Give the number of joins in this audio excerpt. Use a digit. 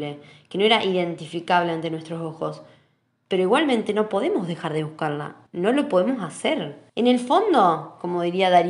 2